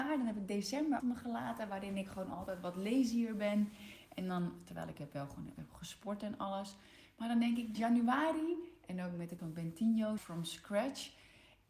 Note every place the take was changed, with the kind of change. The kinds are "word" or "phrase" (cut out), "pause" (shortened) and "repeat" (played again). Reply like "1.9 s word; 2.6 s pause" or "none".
1.0 s word; 7.7 s word; 9.4 s word; 10.2 s word